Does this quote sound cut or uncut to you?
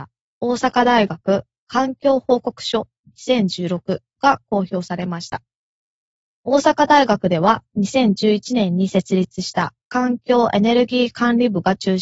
uncut